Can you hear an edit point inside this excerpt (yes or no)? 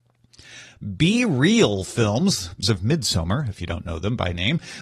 yes